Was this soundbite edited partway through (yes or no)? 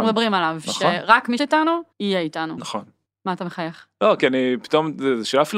yes